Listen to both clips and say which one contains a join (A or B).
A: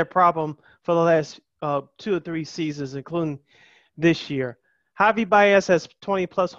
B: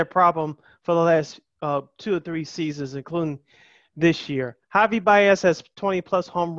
B